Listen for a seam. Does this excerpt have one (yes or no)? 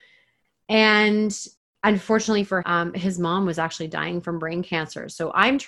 yes